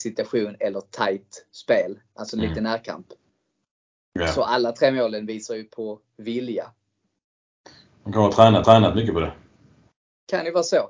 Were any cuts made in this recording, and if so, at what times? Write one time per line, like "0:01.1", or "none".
0:08.6